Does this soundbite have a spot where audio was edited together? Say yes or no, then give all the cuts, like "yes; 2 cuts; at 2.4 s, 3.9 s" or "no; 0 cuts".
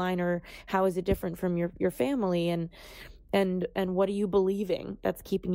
no; 0 cuts